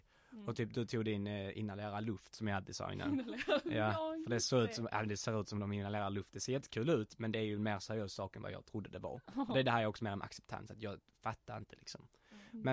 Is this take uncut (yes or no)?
yes